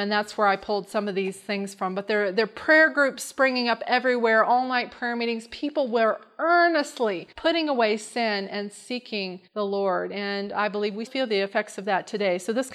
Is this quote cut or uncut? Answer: cut